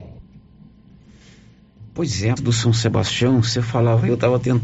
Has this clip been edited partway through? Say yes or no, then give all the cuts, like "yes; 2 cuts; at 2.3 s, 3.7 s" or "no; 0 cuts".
yes; 1 cut; at 2.4 s